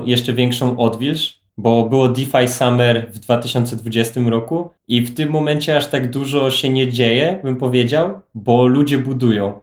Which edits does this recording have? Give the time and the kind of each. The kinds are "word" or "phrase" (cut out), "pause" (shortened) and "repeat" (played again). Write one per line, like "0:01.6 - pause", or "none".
0:01.5 - pause
0:04.8 - pause